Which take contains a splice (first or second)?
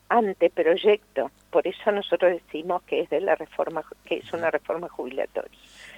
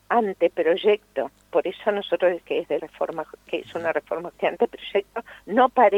second